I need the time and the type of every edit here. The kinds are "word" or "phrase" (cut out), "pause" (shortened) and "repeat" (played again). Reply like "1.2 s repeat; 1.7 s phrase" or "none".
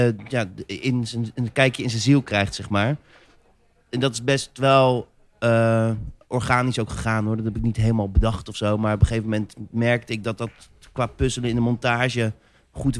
none